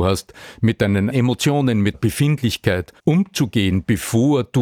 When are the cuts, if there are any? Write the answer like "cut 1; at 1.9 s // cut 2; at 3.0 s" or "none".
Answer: cut 1; at 1.1 s // cut 2; at 1.9 s // cut 3; at 3.0 s